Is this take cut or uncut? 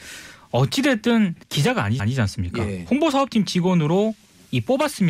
cut